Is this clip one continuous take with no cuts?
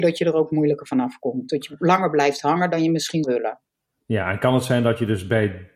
no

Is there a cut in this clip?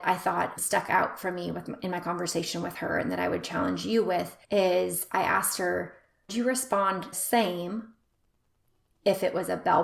yes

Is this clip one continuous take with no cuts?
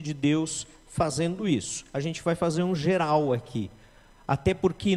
yes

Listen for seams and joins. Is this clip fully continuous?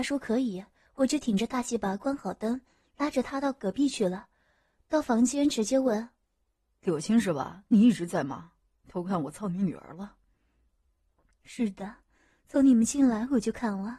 yes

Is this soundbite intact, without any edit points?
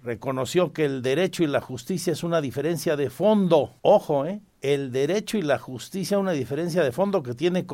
no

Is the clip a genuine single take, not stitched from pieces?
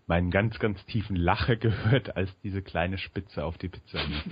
yes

